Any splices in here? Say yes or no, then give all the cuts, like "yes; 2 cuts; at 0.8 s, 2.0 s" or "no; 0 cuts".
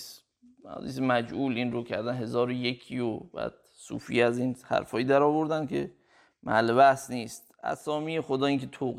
no; 0 cuts